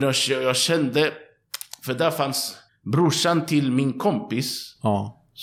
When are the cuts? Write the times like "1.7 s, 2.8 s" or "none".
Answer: 2.7 s